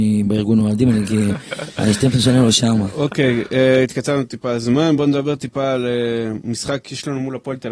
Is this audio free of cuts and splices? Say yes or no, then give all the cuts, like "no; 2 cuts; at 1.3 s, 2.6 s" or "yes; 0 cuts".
yes; 0 cuts